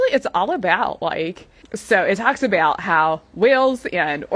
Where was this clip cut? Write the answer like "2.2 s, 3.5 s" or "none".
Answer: 1.6 s